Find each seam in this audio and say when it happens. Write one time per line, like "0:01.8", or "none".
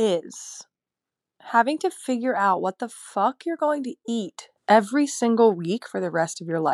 0:04.6